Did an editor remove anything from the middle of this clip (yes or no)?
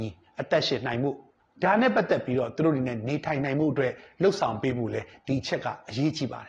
yes